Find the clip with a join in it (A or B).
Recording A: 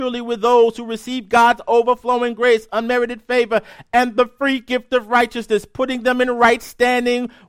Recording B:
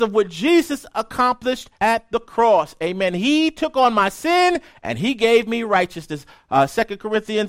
B